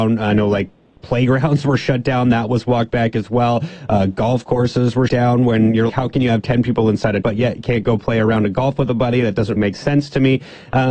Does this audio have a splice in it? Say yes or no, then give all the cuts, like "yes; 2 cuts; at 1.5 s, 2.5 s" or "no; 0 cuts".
yes; 4 cuts; at 5.1 s, 5.9 s, 7.2 s, 9.6 s